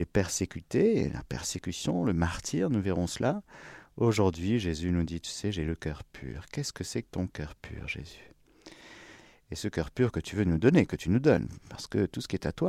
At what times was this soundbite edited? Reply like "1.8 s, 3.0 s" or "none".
none